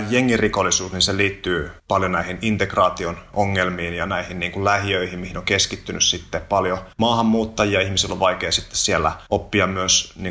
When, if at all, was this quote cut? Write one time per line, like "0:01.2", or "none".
0:01.8
0:06.9
0:09.3